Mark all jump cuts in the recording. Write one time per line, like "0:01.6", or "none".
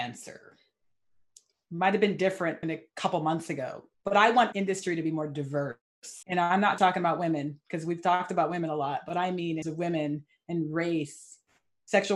0:02.6
0:03.9
0:04.5
0:06.2
0:06.8
0:09.6

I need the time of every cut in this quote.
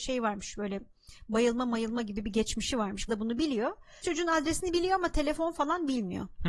0:03.1
0:04.0

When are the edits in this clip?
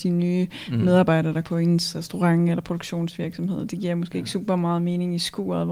0:01.4

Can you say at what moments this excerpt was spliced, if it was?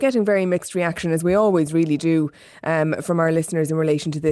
none

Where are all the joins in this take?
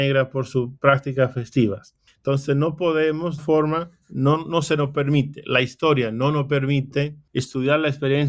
0:02.1
0:03.4

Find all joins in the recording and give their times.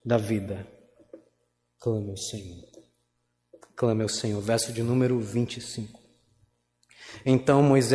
none

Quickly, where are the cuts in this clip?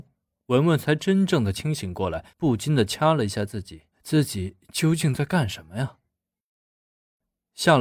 0:02.3
0:03.9

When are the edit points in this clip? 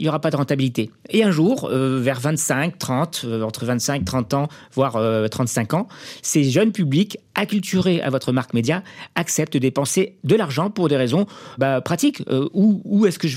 0:11.6

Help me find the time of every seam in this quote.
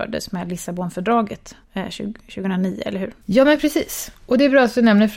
0:01.6
0:03.2

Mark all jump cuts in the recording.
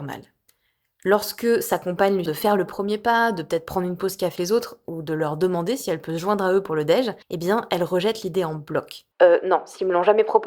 0:02.3
0:04.4
0:07.2
0:09.1

